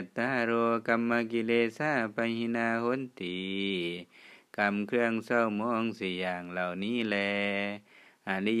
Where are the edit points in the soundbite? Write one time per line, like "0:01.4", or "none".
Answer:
none